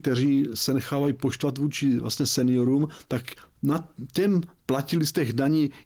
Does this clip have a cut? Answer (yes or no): no